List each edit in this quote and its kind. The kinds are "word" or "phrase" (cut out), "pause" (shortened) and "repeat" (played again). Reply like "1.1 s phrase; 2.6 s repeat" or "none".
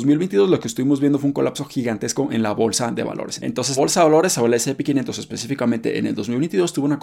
3.8 s word